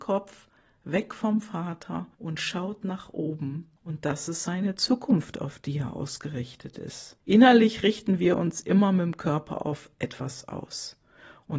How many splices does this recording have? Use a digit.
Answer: 3